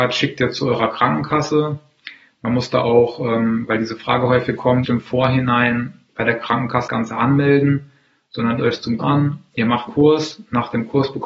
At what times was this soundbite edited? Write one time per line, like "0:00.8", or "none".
0:04.8
0:06.9
0:08.6
0:09.0
0:09.9